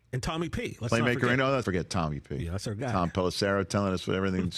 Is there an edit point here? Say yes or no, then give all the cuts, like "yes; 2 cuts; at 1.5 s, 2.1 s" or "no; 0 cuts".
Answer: yes; 1 cut; at 1.6 s